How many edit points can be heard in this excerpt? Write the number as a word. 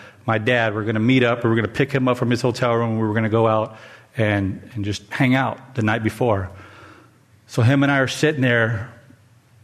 zero